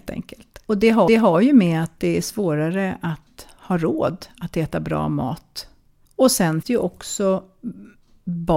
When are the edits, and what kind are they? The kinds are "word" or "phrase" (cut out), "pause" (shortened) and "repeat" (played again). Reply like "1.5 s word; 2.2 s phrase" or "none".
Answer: 1.1 s repeat; 6.0 s pause; 6.6 s word